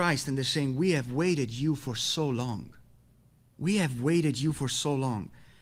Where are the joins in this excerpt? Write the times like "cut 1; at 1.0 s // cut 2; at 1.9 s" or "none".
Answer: none